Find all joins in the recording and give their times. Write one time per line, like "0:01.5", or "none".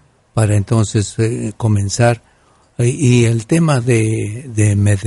none